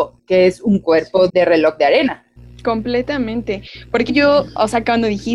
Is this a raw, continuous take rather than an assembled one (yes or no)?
no